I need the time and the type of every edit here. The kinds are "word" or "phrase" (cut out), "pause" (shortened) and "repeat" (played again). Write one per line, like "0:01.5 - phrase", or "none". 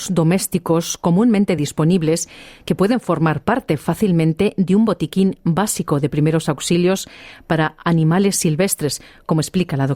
none